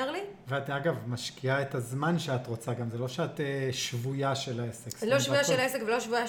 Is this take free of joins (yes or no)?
yes